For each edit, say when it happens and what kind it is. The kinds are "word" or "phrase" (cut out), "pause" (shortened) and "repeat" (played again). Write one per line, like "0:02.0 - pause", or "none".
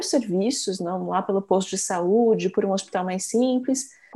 none